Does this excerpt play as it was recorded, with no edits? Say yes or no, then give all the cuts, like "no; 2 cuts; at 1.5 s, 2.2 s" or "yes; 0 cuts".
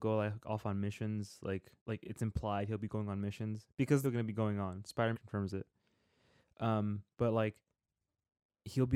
no; 4 cuts; at 1.8 s, 4.0 s, 5.1 s, 7.1 s